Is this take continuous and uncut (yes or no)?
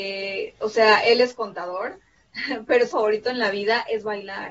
no